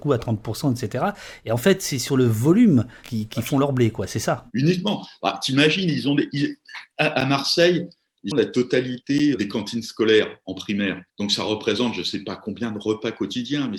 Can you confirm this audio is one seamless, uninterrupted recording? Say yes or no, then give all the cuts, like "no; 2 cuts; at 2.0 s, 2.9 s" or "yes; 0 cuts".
no; 2 cuts; at 8.3 s, 11.1 s